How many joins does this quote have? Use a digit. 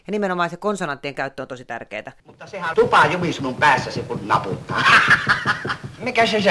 2